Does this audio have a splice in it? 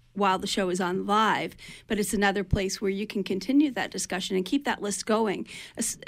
no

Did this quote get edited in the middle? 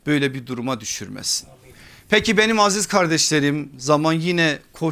no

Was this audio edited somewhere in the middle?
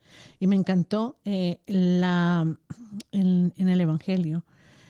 no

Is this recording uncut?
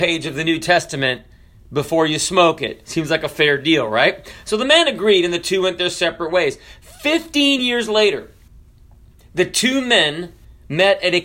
yes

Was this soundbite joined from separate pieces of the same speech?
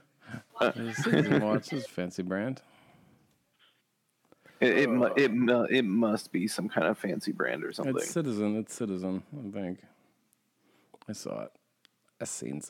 no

